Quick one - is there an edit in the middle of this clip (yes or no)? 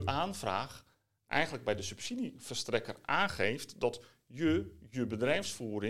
no